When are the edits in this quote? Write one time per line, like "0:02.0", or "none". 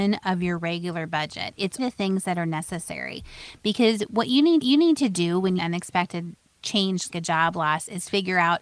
0:01.8
0:04.6
0:05.6
0:07.1